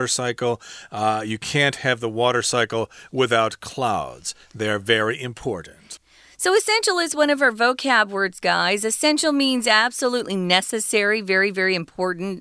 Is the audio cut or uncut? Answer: uncut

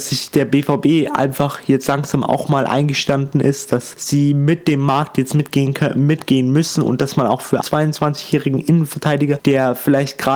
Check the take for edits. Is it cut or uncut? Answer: cut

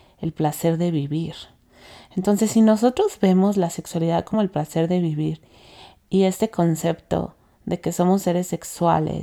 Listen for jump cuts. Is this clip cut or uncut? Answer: uncut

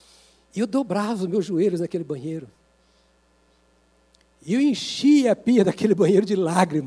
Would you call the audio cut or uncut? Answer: uncut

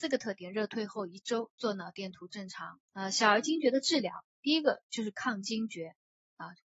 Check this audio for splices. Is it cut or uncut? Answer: cut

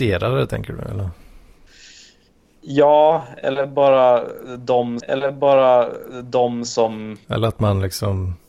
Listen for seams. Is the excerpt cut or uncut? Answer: cut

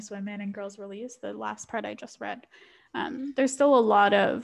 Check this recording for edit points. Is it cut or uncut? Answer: uncut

